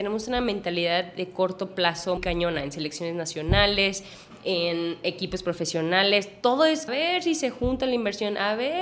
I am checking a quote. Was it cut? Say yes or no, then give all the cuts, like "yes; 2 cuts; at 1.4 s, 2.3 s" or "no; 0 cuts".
yes; 2 cuts; at 2.2 s, 6.9 s